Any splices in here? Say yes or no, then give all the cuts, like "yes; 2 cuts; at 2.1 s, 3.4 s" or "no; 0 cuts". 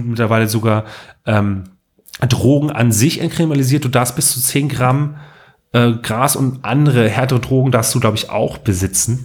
no; 0 cuts